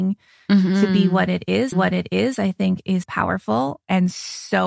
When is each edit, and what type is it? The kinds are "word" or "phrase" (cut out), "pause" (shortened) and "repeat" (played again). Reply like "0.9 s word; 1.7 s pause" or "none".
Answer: 1.7 s repeat; 3.0 s word